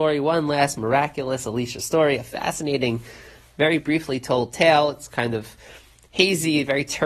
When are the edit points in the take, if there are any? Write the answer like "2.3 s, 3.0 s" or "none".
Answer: none